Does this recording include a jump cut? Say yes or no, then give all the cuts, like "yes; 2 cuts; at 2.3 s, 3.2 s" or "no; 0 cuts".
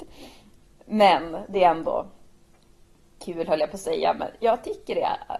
no; 0 cuts